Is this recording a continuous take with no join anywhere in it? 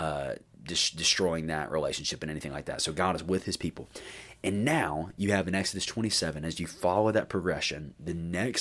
yes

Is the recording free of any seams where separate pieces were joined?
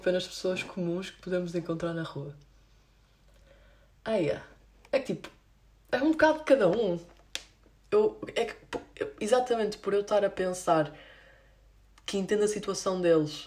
yes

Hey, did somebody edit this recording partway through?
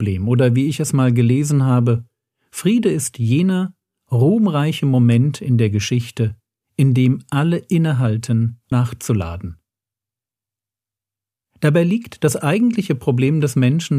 yes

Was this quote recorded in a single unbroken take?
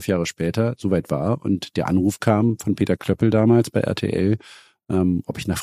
yes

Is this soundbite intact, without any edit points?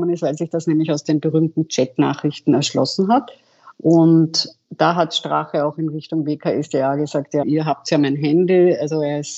no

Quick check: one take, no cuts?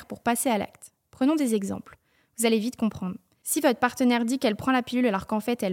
yes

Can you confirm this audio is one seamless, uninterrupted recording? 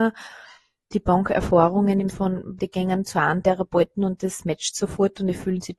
no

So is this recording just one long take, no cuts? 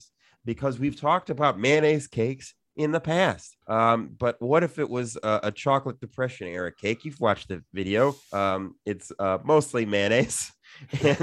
no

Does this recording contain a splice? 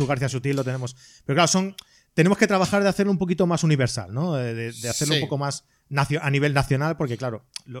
no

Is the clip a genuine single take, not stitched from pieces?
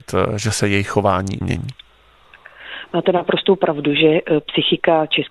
no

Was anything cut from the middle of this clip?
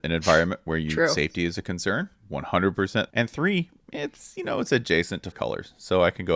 yes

